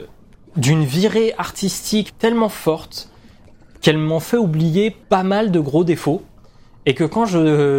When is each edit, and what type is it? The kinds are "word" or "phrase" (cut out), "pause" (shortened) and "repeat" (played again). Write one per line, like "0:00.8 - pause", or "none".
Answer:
0:02.1 - word
0:05.0 - pause